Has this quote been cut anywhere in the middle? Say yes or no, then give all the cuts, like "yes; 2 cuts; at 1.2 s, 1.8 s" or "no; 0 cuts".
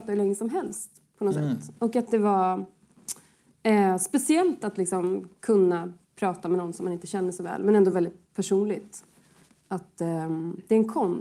no; 0 cuts